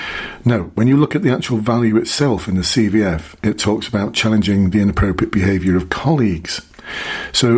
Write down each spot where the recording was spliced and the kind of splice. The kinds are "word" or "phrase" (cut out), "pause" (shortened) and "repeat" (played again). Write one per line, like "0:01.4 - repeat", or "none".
none